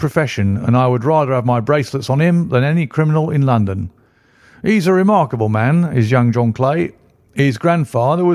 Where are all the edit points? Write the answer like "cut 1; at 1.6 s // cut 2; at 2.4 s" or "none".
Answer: none